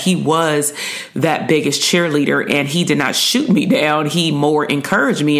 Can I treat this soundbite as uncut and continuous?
yes; 0 cuts

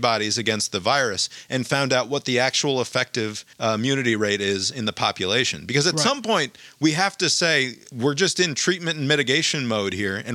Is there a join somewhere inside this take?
yes; 1 cut; at 3.5 s

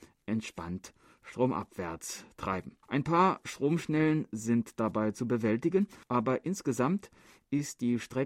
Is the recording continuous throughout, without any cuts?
no; 2 cuts; at 2.8 s, 6.0 s

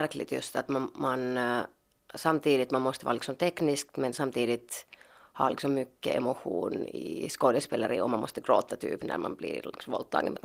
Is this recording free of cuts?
yes; 0 cuts

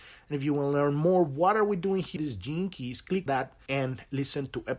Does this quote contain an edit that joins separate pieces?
yes; 3 cuts; at 2.2 s, 3.3 s, 3.7 s

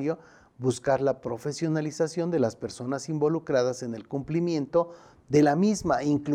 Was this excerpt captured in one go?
yes; 0 cuts

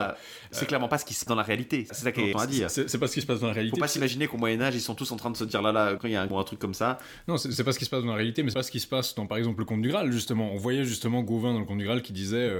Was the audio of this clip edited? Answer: yes; 6 cuts; at 1.3 s, 1.9 s, 2.3 s, 6.0 s, 6.3 s, 8.5 s

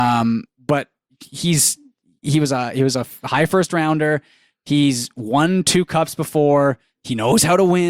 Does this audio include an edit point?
no; 0 cuts

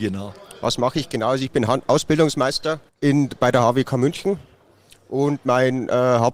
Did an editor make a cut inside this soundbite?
yes; 1 cut; at 2.9 s

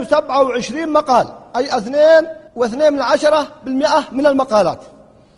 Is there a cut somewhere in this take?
yes; 1 cut; at 2.5 s

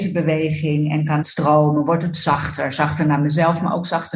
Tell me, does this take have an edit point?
yes; 1 cut; at 1.2 s

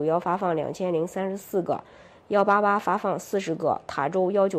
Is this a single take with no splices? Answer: yes; 0 cuts

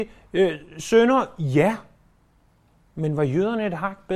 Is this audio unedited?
yes; 0 cuts

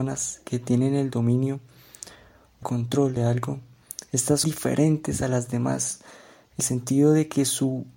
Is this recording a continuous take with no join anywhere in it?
no; 4 cuts; at 2.6 s, 3.2 s, 4.4 s, 6.6 s

